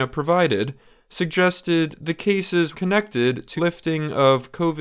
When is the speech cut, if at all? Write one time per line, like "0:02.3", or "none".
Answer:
0:02.7
0:03.6